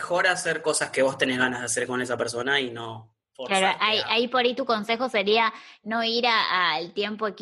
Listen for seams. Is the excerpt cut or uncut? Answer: uncut